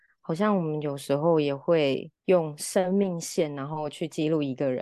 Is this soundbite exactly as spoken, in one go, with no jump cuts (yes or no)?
no